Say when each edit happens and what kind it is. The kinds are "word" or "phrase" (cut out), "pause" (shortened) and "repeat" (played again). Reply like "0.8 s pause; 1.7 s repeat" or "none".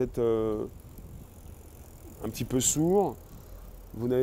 none